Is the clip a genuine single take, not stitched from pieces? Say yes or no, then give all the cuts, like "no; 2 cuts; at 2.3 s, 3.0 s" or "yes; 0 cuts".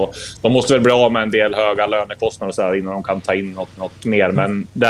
no; 1 cut; at 3.8 s